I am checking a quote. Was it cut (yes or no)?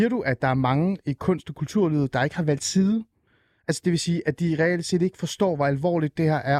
no